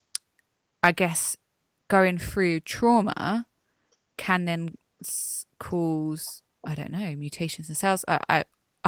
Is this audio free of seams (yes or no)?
yes